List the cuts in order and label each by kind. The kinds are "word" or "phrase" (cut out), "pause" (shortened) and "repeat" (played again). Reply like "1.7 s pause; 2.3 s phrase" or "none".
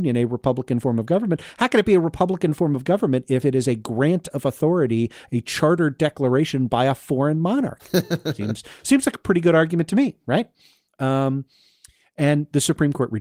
none

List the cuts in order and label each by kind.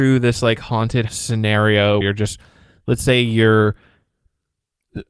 1.1 s word; 2.0 s word

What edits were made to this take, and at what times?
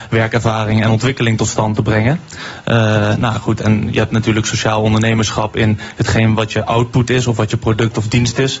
none

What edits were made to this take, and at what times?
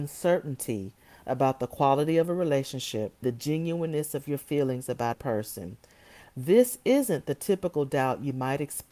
3.2 s word; 5.1 s word

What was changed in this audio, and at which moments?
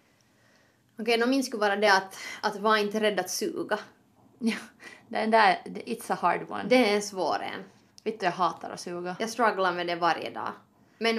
none

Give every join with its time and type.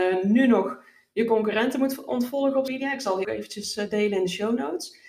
2.7 s word; 3.2 s word

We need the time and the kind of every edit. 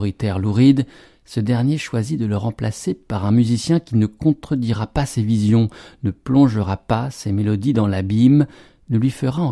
none

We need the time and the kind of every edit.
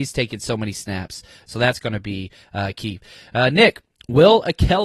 none

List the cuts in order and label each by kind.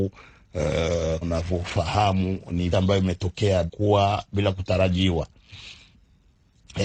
1.2 s word; 2.7 s phrase; 3.7 s word

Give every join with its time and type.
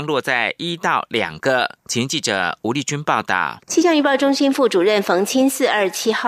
3.6 s pause

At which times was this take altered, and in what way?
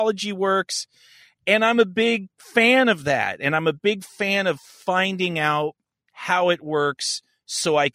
5.9 s pause

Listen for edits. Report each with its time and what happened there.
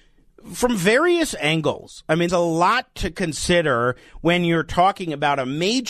2.3 s word

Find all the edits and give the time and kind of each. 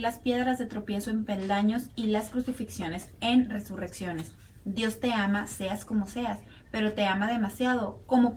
none

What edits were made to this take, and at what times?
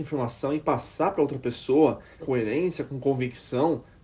2.2 s word

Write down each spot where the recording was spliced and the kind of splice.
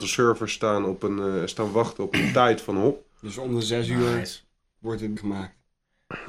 5.2 s word

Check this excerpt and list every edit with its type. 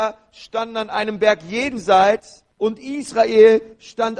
2.5 s pause

